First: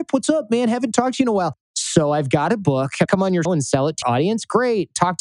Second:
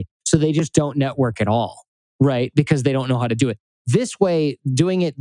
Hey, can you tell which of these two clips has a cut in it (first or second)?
first